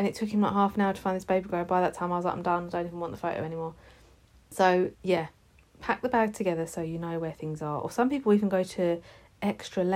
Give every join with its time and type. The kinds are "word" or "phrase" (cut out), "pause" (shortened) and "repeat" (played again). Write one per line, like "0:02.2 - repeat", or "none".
0:04.9 - pause